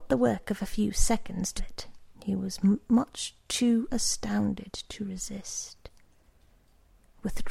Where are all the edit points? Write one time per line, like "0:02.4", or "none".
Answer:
0:01.6
0:02.1